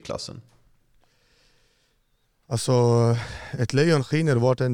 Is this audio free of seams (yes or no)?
yes